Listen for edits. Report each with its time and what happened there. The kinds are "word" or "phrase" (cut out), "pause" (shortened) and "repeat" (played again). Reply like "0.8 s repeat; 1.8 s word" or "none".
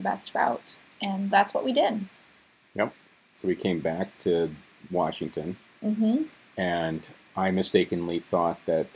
1.3 s word